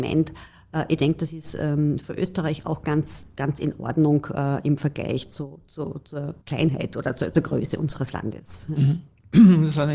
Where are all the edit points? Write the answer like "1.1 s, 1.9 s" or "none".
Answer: 6.4 s